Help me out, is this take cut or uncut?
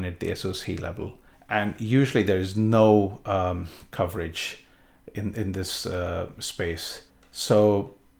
cut